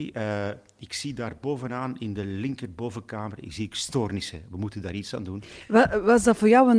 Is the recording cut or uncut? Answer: uncut